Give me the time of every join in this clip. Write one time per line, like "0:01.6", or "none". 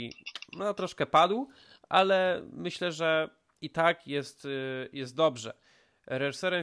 none